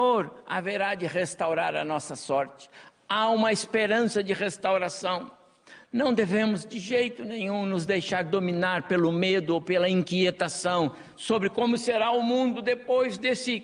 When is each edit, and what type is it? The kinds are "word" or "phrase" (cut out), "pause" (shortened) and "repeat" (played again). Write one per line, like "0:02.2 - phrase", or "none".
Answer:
none